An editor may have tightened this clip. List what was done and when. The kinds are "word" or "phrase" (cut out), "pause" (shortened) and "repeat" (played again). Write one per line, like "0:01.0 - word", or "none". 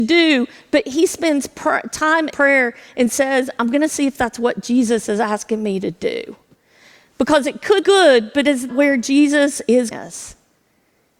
0:02.3 - word
0:07.8 - word
0:08.7 - word
0:09.9 - word